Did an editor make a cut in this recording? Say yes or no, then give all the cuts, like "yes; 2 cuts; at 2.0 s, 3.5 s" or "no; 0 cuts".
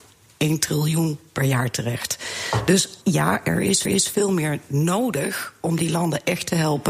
yes; 2 cuts; at 3.0 s, 3.9 s